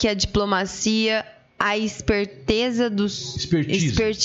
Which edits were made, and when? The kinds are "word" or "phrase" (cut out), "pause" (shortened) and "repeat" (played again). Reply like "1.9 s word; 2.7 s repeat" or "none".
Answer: none